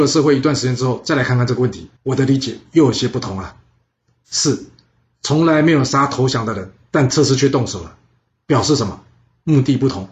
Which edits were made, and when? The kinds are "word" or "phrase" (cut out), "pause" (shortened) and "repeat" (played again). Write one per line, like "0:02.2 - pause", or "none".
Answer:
0:02.0 - pause